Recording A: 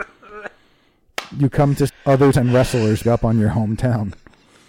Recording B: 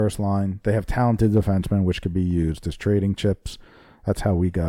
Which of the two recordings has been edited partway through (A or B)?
A